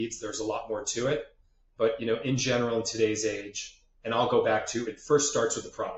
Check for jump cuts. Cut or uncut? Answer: uncut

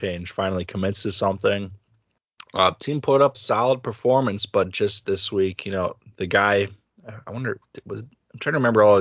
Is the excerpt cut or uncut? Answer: cut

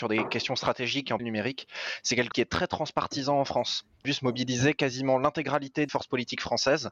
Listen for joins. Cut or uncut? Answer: cut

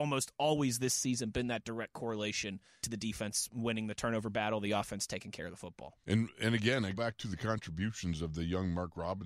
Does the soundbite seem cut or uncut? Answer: cut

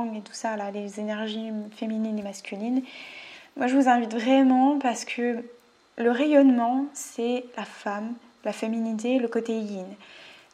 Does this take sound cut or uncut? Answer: uncut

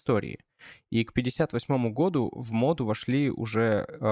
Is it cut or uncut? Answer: uncut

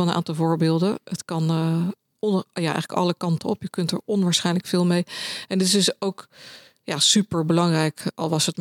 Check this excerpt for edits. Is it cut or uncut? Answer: uncut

